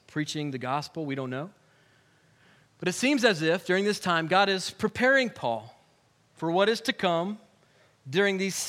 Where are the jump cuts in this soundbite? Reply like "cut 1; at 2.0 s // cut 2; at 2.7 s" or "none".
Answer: none